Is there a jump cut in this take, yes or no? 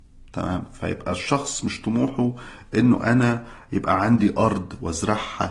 no